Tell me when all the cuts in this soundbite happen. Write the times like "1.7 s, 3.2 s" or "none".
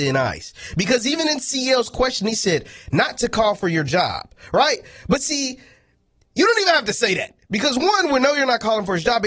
none